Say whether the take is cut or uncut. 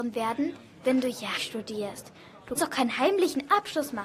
cut